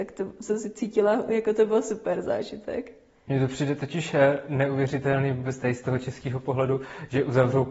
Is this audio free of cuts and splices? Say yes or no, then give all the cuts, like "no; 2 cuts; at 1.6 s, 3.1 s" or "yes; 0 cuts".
yes; 0 cuts